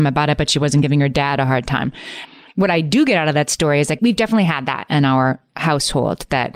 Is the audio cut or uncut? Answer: uncut